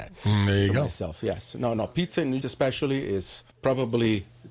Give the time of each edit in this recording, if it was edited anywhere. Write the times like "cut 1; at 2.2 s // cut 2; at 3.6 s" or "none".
cut 1; at 2.4 s // cut 2; at 3.5 s